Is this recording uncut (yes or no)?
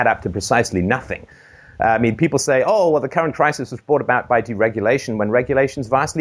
yes